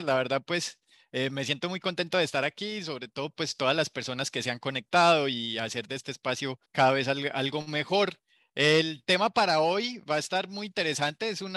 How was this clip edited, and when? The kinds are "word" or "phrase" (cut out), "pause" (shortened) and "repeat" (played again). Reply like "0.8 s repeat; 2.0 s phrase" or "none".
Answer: 6.6 s pause